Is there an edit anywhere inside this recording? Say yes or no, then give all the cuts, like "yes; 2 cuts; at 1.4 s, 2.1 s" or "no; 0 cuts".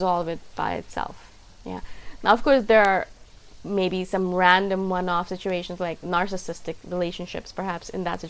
no; 0 cuts